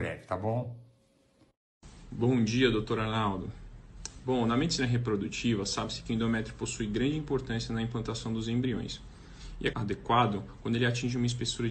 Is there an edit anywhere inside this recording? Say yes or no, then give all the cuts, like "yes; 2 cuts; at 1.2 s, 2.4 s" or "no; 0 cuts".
yes; 1 cut; at 9.7 s